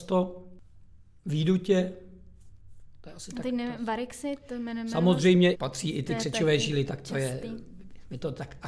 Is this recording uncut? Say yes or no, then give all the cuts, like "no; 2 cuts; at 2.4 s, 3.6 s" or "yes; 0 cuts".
no; 1 cut; at 5.5 s